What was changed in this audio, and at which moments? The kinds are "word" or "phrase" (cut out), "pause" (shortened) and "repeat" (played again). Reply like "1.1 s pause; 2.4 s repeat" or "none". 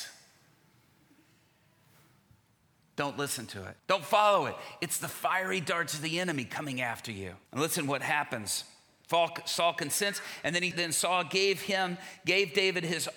3.8 s pause; 7.5 s pause; 10.7 s word

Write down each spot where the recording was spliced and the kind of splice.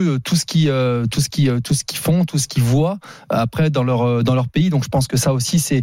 none

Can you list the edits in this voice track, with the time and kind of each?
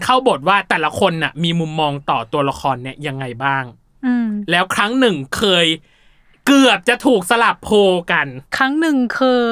none

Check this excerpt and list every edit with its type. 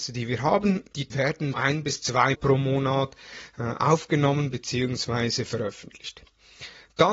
1.1 s word; 1.5 s word; 2.3 s word

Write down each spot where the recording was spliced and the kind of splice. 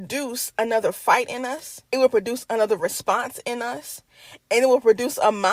1.9 s pause

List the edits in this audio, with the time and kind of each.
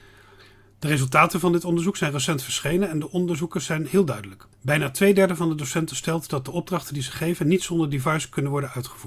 4.5 s pause

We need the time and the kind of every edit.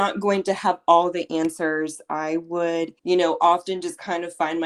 3.0 s pause

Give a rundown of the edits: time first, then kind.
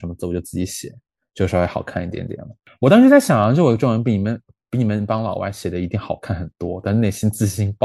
none

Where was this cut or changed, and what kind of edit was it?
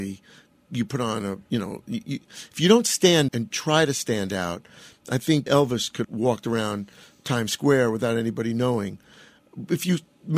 3.3 s word; 5.5 s word; 6.0 s word

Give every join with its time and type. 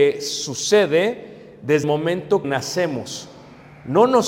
1.8 s word; 2.4 s word

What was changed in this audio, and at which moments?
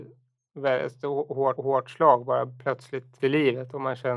1.6 s repeat; 3.2 s word

